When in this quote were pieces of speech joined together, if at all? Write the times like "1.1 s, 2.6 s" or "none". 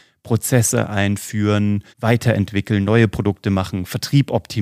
1.9 s